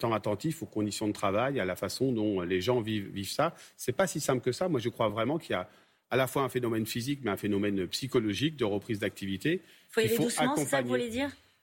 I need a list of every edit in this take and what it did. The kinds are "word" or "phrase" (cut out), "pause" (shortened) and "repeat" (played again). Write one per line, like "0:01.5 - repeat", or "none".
none